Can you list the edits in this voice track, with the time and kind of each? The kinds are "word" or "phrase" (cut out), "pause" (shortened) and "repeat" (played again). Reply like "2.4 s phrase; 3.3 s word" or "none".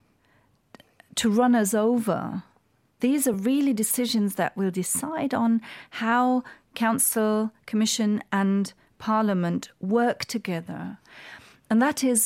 none